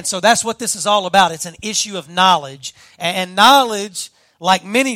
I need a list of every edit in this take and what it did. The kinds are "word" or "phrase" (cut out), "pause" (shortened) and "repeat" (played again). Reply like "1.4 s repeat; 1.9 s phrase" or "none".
none